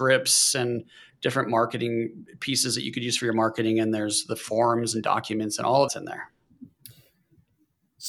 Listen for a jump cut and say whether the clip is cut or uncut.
cut